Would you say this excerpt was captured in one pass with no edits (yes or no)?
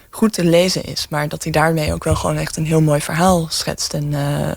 yes